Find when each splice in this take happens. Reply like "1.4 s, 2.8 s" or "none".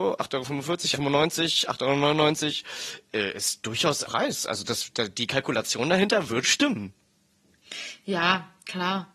0.9 s, 3.6 s, 4.0 s, 6.4 s